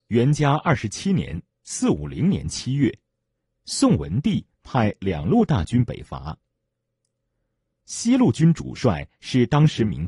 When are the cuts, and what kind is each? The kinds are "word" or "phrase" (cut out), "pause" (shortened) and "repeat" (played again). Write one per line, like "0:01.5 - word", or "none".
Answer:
none